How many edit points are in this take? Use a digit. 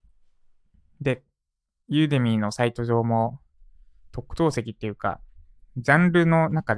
0